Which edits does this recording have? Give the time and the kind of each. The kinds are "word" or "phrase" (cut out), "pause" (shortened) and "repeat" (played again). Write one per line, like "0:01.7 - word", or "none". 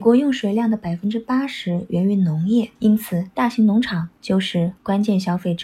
0:02.8 - pause